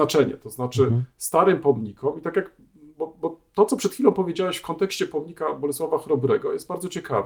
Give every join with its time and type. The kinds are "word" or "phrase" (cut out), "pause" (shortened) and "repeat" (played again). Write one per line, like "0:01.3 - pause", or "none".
none